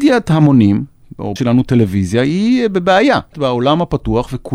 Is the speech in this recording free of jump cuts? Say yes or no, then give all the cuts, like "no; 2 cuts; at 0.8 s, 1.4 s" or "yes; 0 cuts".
no; 2 cuts; at 1.4 s, 3.3 s